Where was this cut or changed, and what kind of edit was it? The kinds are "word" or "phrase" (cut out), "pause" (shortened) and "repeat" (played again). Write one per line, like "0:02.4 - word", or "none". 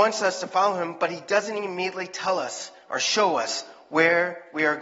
none